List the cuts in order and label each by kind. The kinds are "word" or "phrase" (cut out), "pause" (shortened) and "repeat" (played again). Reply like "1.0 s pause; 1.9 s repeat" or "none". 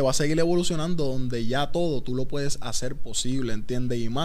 none